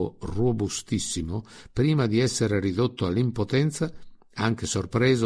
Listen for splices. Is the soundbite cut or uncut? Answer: uncut